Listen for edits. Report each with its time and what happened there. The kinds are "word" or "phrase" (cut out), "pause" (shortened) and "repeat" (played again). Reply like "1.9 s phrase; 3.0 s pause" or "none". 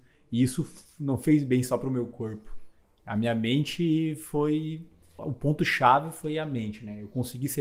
5.2 s phrase